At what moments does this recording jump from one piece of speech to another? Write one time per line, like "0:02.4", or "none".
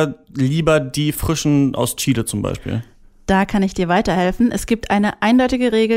none